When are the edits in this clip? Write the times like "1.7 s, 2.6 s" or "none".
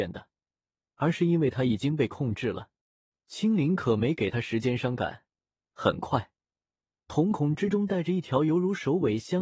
none

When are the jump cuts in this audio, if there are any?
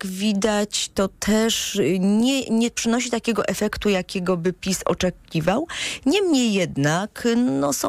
none

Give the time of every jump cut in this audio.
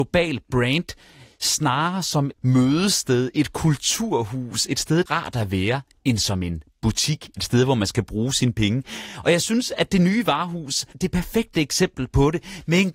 2.3 s, 5.1 s, 10.9 s

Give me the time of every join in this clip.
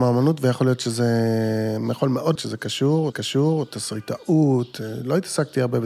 2.3 s, 3.1 s

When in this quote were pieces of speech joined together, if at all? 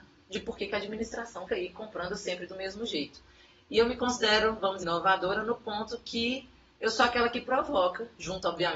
1.5 s, 4.8 s

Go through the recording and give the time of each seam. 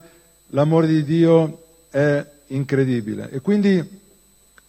none

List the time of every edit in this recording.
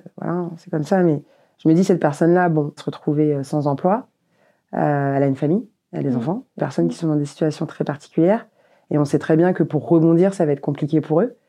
2.8 s, 6.6 s

